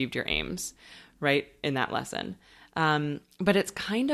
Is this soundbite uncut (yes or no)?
yes